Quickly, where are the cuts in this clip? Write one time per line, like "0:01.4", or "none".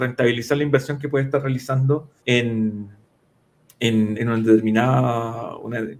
0:02.2
0:04.1